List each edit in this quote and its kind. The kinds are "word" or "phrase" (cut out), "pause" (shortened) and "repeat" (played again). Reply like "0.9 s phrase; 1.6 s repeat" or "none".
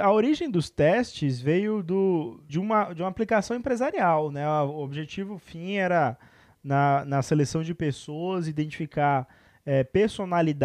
2.5 s word